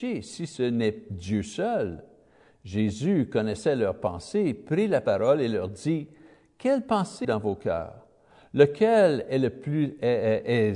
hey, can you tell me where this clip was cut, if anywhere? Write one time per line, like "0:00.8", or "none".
0:07.2